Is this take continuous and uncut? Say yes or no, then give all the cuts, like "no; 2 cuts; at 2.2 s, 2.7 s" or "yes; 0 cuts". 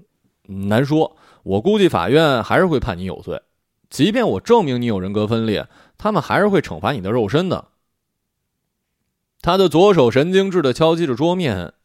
yes; 0 cuts